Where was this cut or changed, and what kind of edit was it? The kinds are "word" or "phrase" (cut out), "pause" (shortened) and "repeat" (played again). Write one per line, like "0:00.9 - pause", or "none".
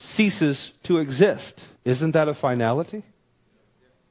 0:01.8 - pause

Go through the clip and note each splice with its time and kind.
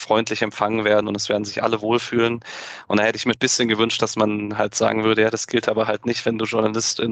0:03.3 - word

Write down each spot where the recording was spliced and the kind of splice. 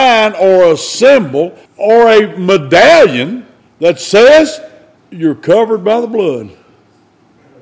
0:01.7 - pause
0:03.6 - pause
0:05.0 - pause

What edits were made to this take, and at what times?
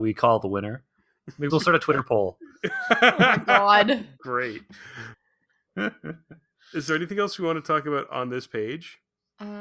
0:01.5 - word

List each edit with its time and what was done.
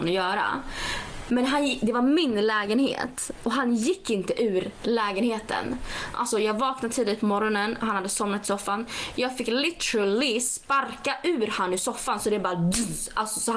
none

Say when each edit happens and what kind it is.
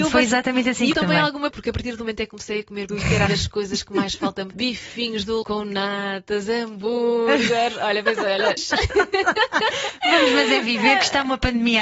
0:00.9 - word
0:01.5 - word
0:02.9 - word
0:03.3 - word
0:04.5 - word
0:05.4 - word
0:08.6 - word

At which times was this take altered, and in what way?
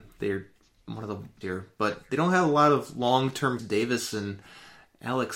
0:01.4 - phrase
0:03.6 - phrase

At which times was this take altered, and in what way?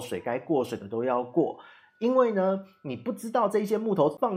none

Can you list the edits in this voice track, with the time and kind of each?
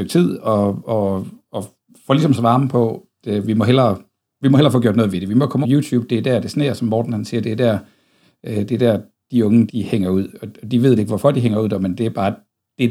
0:02.4 - word
0:03.2 - word
0:05.6 - word
0:09.7 - word
0:11.0 - word

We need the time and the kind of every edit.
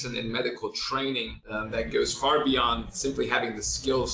none

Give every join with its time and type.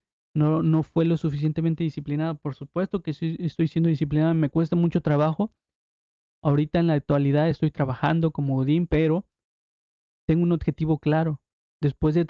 none

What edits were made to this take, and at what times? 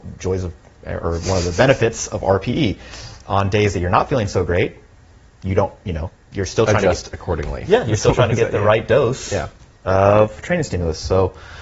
none

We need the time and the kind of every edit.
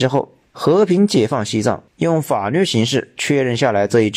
0:01.9 - pause

